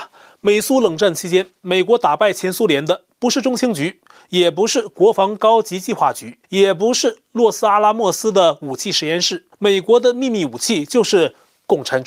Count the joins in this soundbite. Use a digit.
2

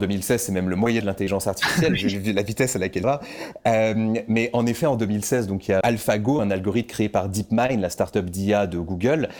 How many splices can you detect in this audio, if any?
3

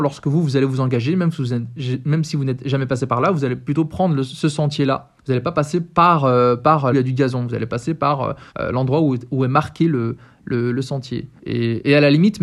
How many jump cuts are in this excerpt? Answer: 4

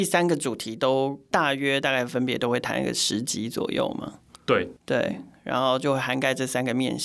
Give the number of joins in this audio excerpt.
1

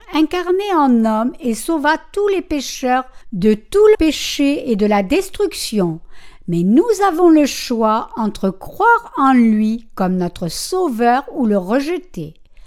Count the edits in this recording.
1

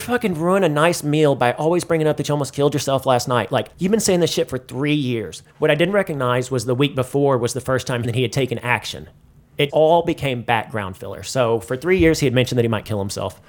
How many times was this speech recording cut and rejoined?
4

